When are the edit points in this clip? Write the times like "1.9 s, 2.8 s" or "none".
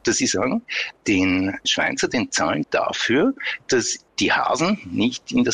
1.6 s, 2.6 s